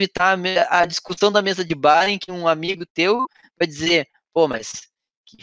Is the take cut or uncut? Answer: uncut